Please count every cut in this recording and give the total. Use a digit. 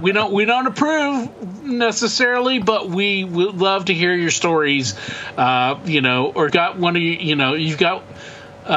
1